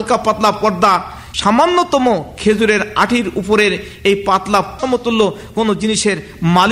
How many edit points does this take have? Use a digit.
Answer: 2